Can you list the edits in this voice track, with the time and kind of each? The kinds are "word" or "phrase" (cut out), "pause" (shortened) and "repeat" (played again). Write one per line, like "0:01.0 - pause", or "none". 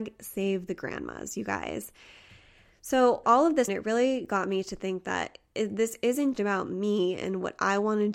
0:03.2 - word
0:03.7 - word
0:06.3 - word